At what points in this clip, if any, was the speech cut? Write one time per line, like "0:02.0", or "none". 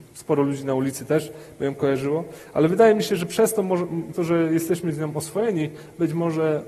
0:04.1